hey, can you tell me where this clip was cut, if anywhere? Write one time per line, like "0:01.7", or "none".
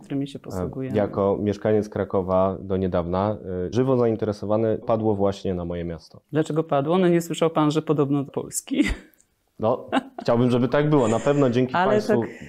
0:03.7
0:04.8
0:06.2
0:08.3